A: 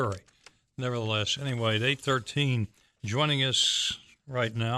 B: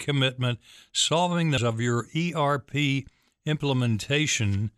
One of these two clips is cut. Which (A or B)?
B